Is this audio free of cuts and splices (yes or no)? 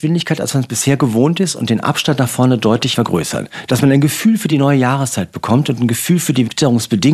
yes